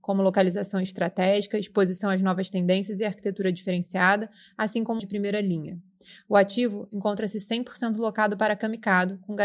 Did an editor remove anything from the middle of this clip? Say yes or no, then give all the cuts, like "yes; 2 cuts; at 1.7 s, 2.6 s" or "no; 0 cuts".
yes; 1 cut; at 5.0 s